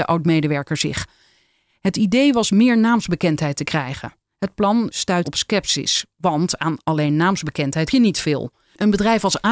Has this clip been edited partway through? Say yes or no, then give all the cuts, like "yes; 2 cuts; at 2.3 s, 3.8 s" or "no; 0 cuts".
yes; 2 cuts; at 5.2 s, 7.9 s